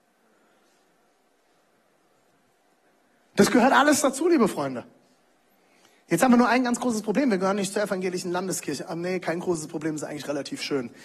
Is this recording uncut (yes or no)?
yes